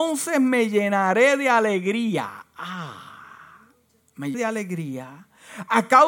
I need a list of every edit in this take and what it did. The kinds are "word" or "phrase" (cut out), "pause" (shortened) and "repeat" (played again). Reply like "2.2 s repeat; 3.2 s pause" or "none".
4.3 s word